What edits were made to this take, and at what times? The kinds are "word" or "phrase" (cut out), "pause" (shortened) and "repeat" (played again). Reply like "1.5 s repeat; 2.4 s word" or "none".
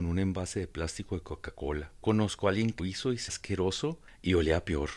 2.8 s word; 3.3 s word